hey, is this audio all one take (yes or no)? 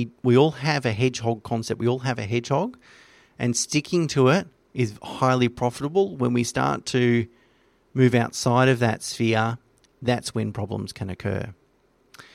yes